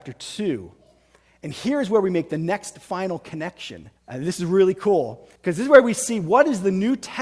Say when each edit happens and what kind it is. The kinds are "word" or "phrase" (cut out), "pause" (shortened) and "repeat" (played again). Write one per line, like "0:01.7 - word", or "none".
0:04.0 - pause
0:05.4 - pause